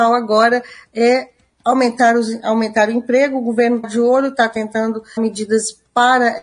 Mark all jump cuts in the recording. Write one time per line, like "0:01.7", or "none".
0:03.8
0:05.2